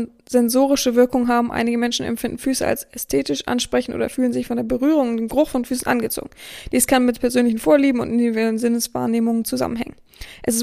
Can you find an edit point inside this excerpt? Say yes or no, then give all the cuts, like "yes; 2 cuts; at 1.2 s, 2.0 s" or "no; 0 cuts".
no; 0 cuts